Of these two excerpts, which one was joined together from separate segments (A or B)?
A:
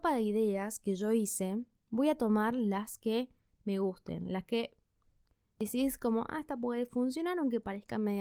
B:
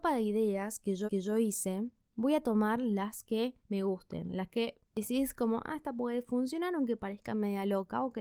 B